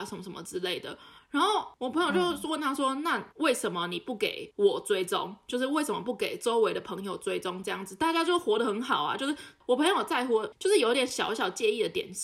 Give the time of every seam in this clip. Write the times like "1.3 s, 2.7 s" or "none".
1.2 s, 3.3 s